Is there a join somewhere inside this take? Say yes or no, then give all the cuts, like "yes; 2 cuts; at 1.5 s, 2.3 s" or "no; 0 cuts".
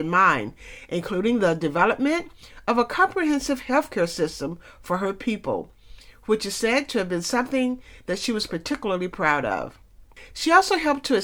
no; 0 cuts